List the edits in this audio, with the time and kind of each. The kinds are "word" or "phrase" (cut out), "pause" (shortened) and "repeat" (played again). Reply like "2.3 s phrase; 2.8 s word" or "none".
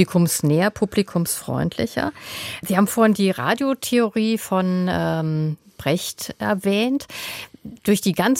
none